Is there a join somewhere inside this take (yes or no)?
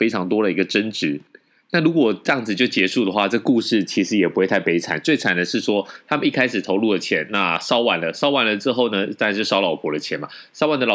no